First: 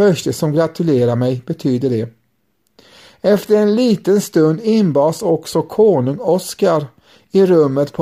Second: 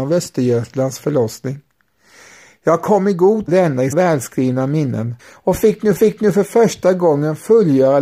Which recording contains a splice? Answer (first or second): second